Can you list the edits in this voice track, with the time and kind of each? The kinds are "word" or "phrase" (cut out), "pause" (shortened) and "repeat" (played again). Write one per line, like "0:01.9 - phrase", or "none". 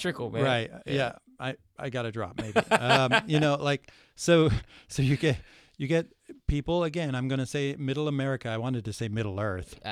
none